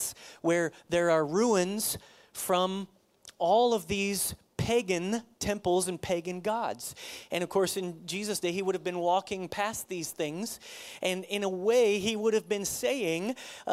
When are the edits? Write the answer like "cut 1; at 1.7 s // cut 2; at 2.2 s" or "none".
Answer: none